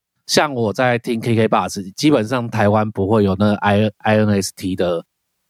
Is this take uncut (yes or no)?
yes